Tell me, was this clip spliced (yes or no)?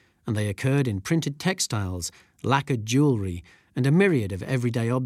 no